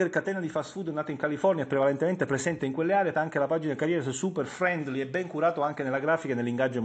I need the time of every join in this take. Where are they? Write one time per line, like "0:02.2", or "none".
0:03.1

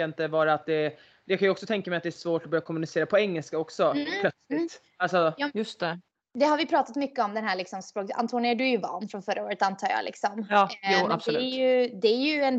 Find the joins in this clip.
none

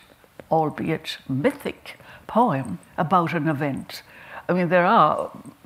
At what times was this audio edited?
0:02.9

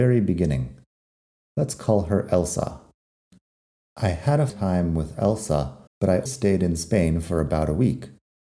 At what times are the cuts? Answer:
0:04.5
0:05.9
0:06.3

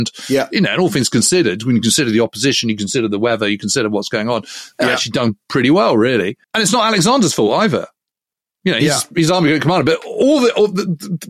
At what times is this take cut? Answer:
0:06.4

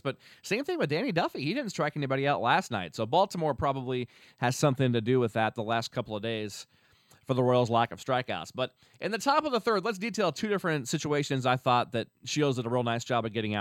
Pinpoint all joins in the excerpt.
none

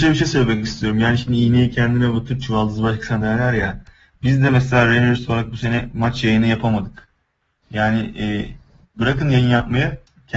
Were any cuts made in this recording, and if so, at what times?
none

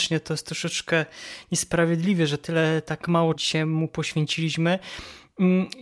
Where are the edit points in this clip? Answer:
0:03.3

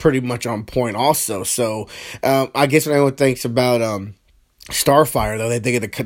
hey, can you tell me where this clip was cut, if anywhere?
0:04.4

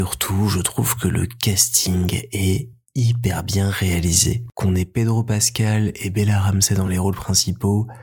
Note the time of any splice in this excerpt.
none

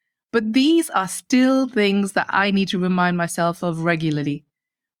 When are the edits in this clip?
none

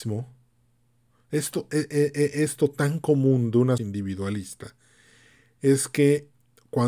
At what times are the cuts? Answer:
0:03.8

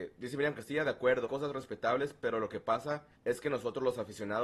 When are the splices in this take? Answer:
0:01.2
0:03.1

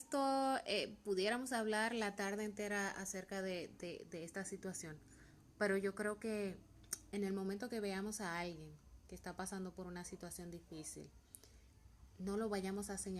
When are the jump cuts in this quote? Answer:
none

